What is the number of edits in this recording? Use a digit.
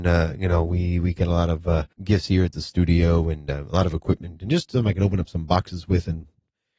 1